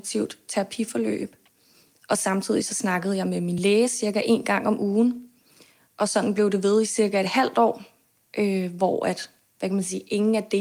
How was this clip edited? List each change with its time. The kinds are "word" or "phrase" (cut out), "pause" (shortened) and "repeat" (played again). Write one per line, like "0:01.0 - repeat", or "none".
none